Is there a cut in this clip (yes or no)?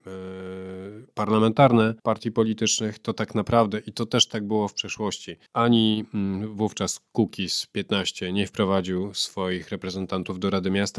yes